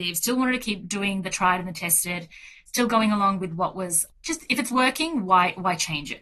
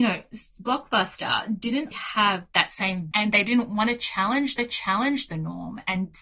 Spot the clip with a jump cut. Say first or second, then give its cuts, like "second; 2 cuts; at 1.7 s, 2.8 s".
second; 3 cuts; at 1.9 s, 3.1 s, 4.6 s